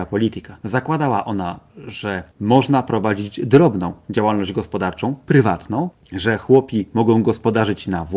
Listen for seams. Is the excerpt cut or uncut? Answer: uncut